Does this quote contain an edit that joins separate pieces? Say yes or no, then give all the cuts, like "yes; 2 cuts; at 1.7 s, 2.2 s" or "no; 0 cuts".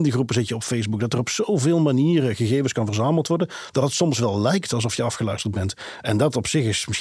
no; 0 cuts